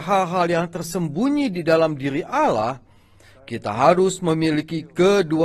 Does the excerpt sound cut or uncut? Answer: uncut